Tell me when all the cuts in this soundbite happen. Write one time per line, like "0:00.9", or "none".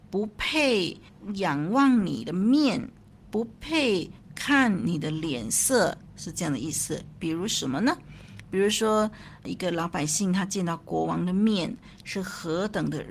none